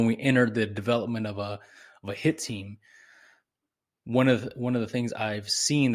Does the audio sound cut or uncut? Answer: uncut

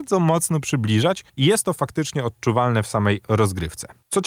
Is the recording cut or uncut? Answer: cut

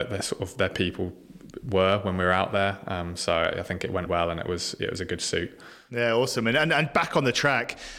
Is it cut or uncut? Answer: cut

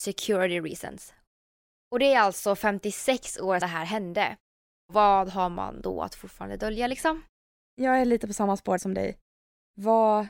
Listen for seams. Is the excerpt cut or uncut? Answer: cut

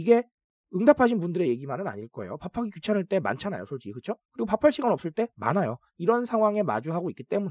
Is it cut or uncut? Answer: cut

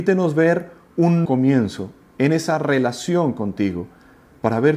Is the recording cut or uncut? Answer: cut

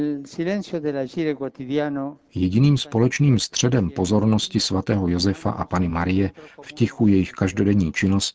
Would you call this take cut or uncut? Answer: uncut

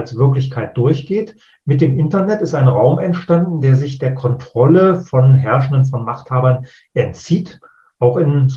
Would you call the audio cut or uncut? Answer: uncut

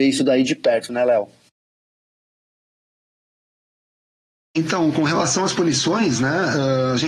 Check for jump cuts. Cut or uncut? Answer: uncut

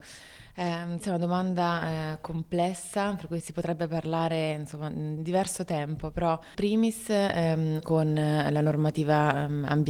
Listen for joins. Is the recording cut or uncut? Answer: cut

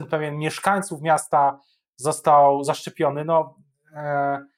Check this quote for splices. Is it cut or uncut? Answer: uncut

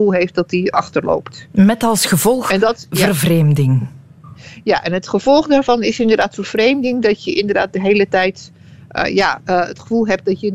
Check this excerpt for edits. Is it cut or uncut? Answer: uncut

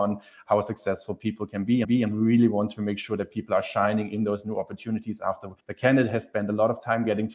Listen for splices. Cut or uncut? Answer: cut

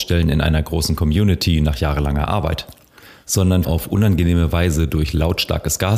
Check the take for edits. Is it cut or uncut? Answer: cut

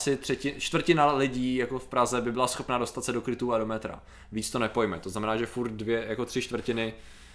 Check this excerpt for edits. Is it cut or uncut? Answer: uncut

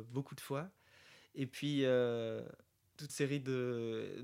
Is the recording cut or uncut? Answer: cut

